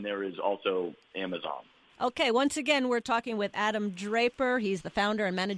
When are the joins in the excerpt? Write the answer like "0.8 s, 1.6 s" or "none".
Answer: none